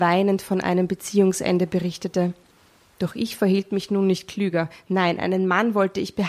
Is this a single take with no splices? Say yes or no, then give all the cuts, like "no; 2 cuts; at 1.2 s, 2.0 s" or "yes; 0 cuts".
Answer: yes; 0 cuts